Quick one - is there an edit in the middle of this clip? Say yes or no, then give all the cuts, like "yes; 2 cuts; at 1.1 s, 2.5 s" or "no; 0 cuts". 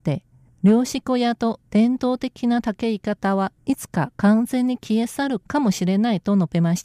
yes; 1 cut; at 3.6 s